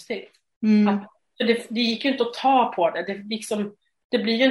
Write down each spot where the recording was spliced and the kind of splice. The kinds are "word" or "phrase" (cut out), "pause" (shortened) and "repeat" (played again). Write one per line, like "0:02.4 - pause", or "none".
none